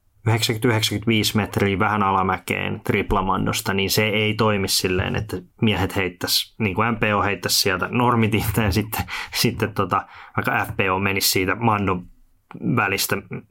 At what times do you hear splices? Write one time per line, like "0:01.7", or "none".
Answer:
none